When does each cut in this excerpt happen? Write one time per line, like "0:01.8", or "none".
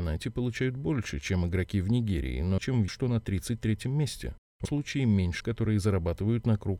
0:02.6
0:02.9
0:04.6
0:05.4